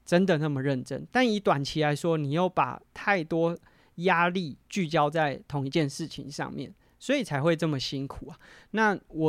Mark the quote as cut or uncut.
uncut